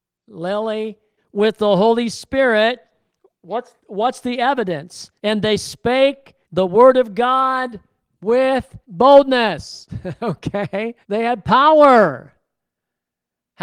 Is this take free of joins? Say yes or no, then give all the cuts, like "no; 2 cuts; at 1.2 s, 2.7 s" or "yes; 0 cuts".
no; 6 cuts; at 1.2 s, 3.8 s, 5.2 s, 6.4 s, 8.8 s, 11.0 s